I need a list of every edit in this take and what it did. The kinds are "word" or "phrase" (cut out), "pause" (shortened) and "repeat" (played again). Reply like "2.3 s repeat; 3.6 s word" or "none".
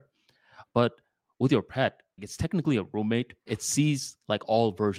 2.2 s word; 3.5 s word